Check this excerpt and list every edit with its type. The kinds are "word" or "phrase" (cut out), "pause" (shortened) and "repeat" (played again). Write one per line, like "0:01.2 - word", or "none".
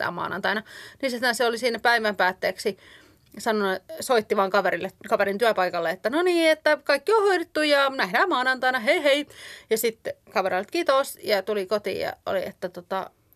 0:05.0 - pause